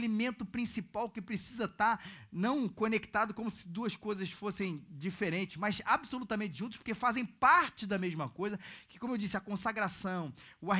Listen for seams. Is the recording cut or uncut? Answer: uncut